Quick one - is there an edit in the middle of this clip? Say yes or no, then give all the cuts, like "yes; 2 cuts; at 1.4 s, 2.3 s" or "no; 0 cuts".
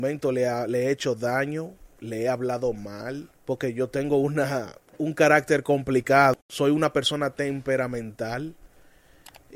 yes; 4 cuts; at 1.9 s, 3.4 s, 4.9 s, 6.4 s